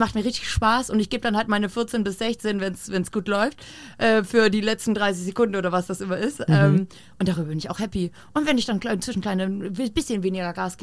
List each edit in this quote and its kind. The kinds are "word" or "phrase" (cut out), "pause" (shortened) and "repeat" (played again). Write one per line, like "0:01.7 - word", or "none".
none